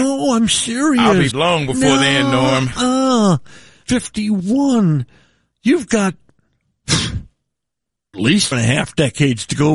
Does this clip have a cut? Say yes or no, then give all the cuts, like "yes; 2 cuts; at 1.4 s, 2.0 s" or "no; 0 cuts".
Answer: yes; 4 cuts; at 1.3 s, 3.8 s, 8.1 s, 8.5 s